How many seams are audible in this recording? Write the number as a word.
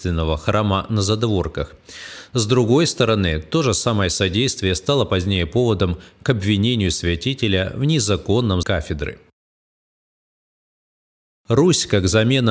one